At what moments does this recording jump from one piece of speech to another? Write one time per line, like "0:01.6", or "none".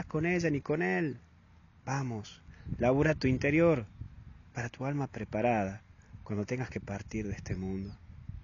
0:04.7